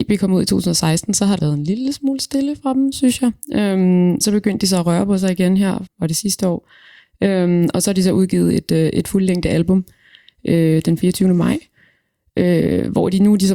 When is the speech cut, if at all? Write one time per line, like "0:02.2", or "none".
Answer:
0:01.4
0:04.2
0:05.9